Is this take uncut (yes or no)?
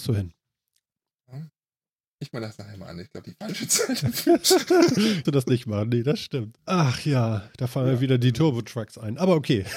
no